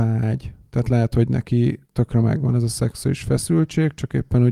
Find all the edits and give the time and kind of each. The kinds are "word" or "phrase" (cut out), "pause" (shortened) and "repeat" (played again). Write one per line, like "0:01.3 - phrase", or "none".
0:01.8 - pause